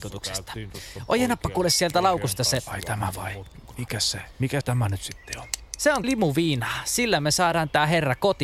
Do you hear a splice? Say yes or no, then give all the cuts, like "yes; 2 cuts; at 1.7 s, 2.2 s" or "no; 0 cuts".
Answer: yes; 2 cuts; at 4.6 s, 6.0 s